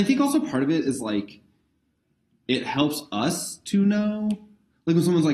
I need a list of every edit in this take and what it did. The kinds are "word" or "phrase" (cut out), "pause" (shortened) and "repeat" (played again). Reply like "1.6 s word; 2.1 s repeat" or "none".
none